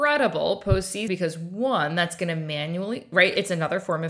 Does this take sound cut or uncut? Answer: cut